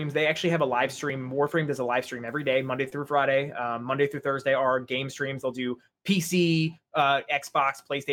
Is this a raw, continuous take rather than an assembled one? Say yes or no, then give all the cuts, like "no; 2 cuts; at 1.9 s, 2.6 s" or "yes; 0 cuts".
yes; 0 cuts